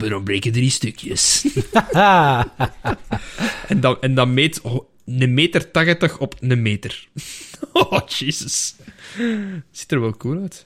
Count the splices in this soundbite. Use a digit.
0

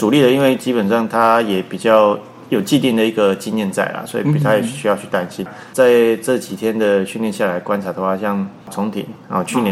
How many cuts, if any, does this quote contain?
1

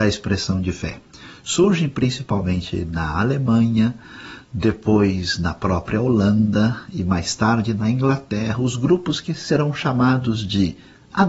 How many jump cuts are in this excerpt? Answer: 0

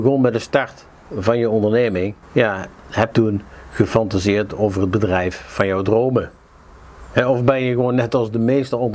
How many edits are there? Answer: 2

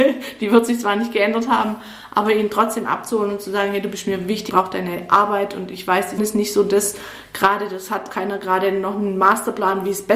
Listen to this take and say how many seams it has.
3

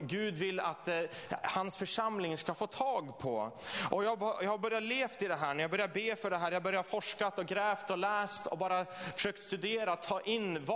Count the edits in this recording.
0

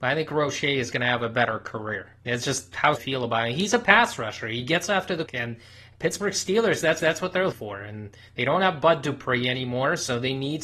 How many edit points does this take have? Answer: 5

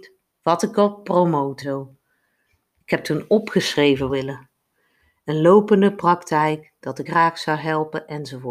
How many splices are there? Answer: 3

